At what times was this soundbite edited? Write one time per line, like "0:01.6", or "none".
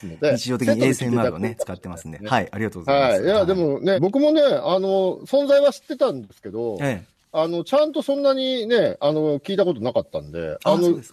0:03.9